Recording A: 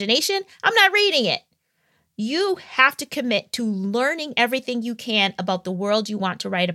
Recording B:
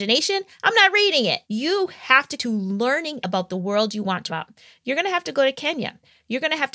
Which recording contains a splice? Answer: B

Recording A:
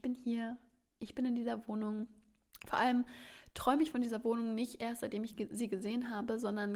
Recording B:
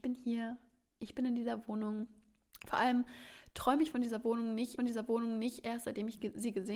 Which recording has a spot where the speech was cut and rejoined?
B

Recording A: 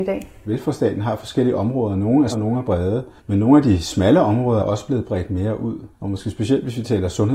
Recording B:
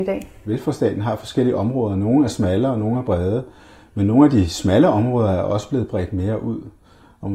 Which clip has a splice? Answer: A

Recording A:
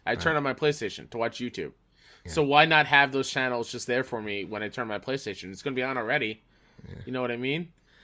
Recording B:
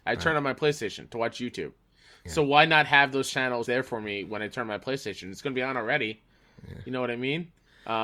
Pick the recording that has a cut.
B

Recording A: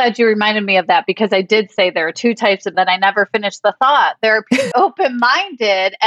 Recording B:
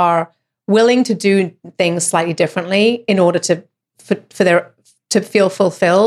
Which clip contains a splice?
A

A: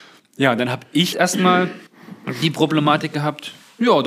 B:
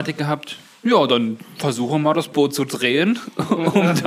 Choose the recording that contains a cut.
A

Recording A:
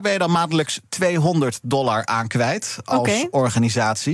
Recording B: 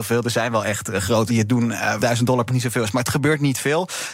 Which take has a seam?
B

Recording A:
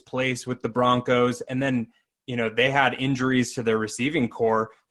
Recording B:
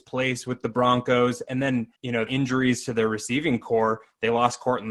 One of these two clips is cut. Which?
B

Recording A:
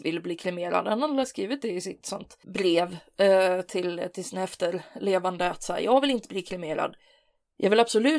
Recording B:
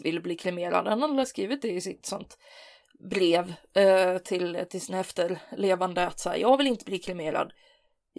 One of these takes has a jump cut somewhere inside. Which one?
A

